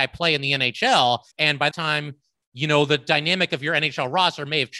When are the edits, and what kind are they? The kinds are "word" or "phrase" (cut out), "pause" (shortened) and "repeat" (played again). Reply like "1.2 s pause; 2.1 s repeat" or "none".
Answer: 1.3 s pause; 1.7 s word